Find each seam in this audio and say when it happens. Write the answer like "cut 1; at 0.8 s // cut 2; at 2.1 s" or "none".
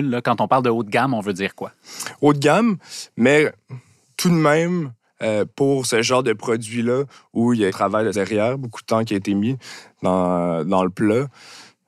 cut 1; at 7.7 s // cut 2; at 8.1 s

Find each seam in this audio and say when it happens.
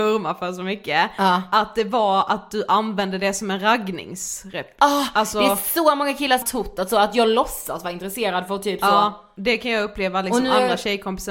cut 1; at 6.4 s

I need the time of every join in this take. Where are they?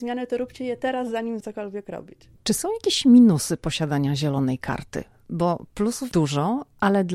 cut 1; at 1.4 s // cut 2; at 6.1 s

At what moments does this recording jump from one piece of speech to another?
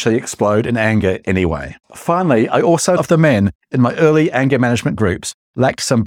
cut 1; at 1.8 s // cut 2; at 3.0 s

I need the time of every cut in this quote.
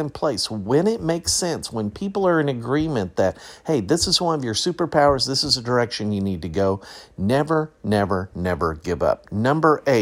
none

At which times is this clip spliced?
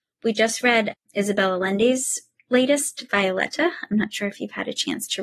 none

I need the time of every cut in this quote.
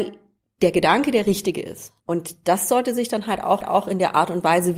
cut 1; at 2.0 s // cut 2; at 3.6 s

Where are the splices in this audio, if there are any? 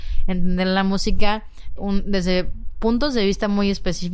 cut 1; at 1.8 s

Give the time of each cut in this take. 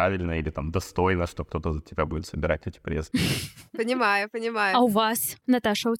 none

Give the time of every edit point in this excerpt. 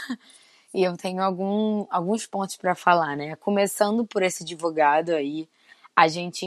none

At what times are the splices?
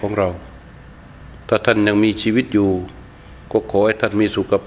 cut 1; at 3.4 s

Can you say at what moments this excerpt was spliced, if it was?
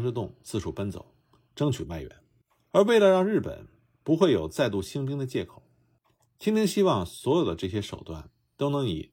none

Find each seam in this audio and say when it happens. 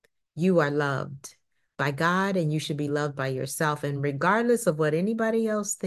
none

